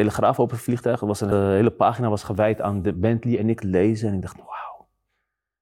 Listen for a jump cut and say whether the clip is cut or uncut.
cut